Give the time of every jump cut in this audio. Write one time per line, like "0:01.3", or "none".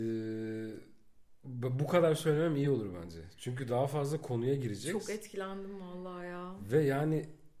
none

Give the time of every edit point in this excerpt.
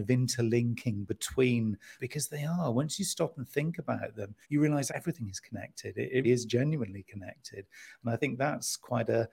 0:02.0
0:04.4
0:04.9
0:06.2

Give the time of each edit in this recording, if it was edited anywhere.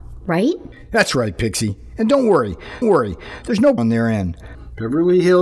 0:02.8
0:03.8

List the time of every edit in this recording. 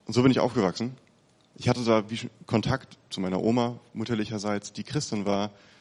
none

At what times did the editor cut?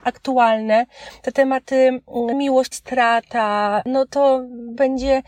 0:02.3
0:02.7

